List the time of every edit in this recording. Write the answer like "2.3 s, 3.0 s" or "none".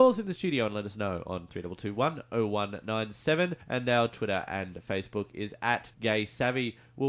3.6 s, 5.9 s